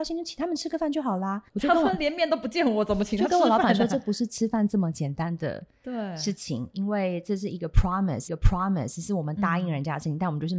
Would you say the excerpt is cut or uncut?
cut